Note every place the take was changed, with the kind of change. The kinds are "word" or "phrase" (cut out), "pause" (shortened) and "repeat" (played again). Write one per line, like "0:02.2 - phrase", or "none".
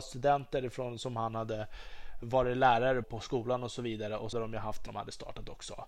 0:02.2 - word
0:03.0 - word
0:04.3 - word
0:04.9 - phrase